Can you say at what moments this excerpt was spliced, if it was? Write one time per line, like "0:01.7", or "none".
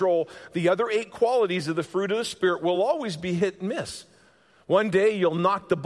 none